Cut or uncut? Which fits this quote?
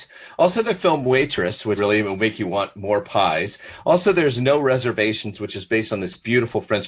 cut